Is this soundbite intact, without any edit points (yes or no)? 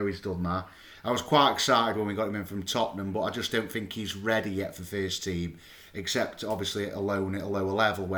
yes